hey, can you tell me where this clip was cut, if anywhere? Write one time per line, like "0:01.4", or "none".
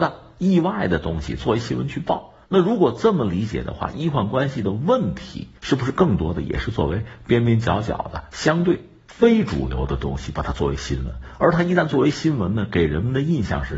0:02.4
0:05.6